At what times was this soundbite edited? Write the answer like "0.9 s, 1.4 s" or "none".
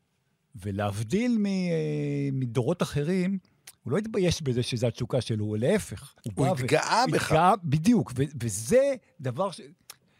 3.8 s, 6.2 s